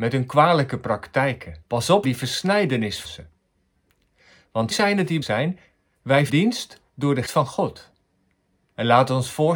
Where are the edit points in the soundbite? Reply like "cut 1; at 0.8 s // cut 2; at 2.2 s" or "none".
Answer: cut 1; at 1.6 s // cut 2; at 2.0 s // cut 3; at 3.0 s // cut 4; at 4.7 s // cut 5; at 5.2 s // cut 6; at 6.3 s // cut 7; at 6.9 s // cut 8; at 7.3 s